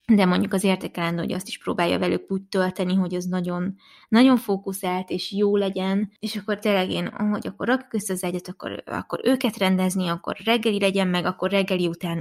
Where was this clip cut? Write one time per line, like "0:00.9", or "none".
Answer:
none

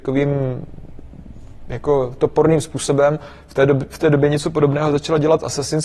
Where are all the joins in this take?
none

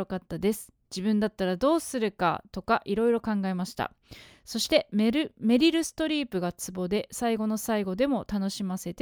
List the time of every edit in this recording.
none

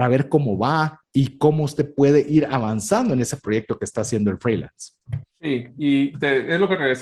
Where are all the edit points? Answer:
0:05.3

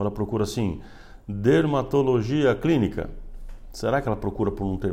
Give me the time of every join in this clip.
none

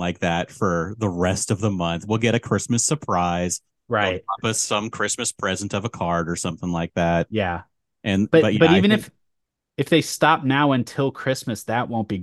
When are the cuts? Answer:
none

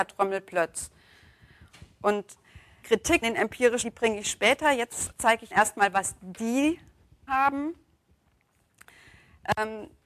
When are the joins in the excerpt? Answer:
0:02.8
0:03.2
0:03.8
0:05.1
0:05.5
0:07.3

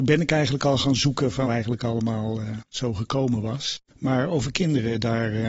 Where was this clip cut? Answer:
0:01.4

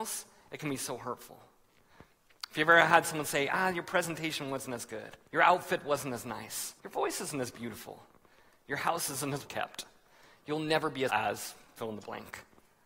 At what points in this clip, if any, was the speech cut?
0:05.3
0:06.8
0:09.4
0:11.1

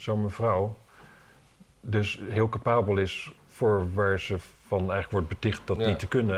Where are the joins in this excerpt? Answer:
0:03.4
0:04.6

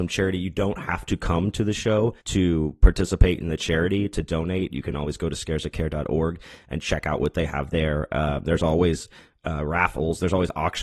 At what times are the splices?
0:02.2

